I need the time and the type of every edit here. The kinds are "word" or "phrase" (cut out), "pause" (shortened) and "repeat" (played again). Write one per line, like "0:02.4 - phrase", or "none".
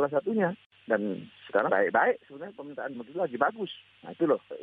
0:01.7 - word
0:02.9 - word